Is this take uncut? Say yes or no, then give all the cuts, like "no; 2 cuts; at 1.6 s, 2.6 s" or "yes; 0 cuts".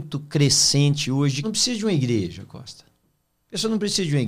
no; 1 cut; at 1.4 s